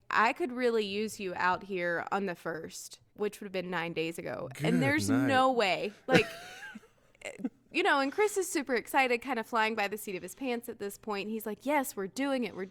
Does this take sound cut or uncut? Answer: cut